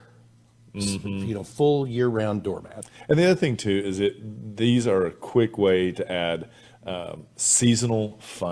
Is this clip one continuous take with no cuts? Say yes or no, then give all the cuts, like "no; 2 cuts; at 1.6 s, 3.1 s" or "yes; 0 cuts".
yes; 0 cuts